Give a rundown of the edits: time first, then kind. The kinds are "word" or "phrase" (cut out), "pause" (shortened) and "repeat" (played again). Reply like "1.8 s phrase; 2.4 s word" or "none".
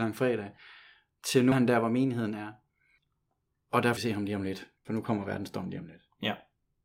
1.5 s word; 4.0 s word; 4.8 s pause